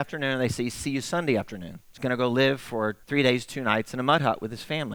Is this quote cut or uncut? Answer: cut